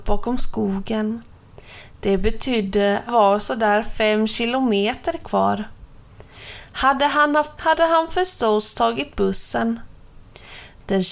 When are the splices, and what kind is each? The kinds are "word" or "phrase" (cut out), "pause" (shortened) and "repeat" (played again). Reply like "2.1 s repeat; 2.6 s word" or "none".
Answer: 3.1 s phrase; 7.6 s word